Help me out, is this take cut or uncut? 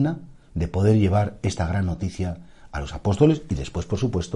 uncut